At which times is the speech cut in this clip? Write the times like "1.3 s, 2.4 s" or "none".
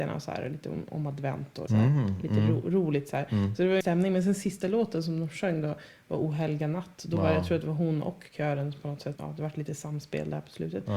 1.7 s, 3.8 s, 9.2 s